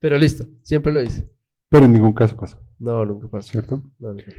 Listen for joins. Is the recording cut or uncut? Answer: uncut